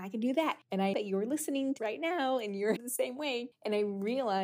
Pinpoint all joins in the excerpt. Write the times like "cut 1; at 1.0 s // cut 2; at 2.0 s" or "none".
cut 1; at 0.9 s // cut 2; at 1.8 s // cut 3; at 2.8 s